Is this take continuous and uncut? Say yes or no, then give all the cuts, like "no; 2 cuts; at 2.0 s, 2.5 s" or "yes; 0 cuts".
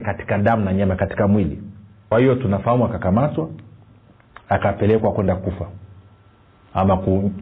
no; 1 cut; at 2.1 s